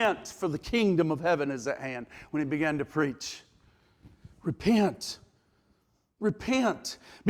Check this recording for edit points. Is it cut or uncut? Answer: uncut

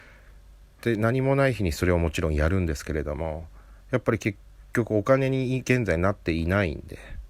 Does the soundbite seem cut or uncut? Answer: cut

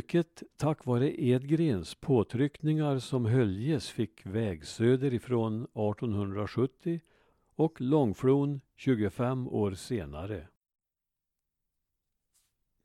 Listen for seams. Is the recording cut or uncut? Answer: uncut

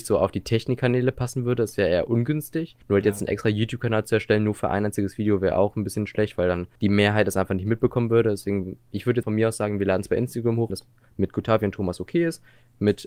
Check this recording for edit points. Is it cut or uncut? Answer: cut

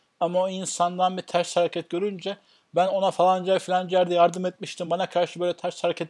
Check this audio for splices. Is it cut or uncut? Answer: uncut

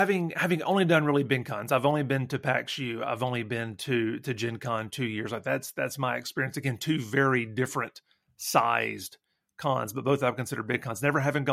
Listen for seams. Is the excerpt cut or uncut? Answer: uncut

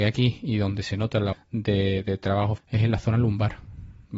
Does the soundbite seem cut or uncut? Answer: cut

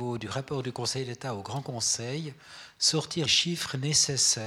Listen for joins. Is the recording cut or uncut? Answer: cut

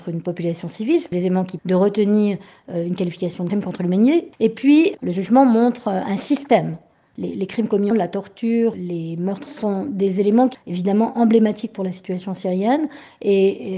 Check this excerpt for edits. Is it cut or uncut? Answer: cut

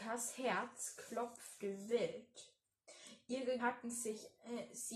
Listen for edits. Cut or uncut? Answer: cut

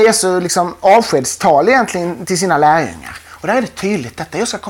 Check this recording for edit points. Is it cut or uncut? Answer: uncut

